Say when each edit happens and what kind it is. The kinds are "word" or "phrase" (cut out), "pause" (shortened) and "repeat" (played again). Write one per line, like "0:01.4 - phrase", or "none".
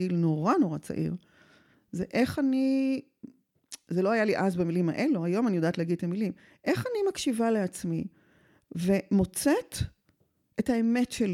none